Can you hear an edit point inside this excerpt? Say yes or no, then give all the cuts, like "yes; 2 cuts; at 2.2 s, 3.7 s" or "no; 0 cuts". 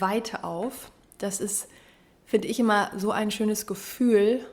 no; 0 cuts